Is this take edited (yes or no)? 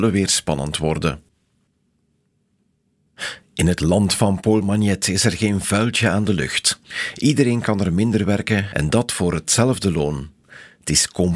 no